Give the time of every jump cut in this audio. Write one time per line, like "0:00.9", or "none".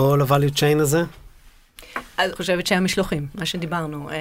0:02.4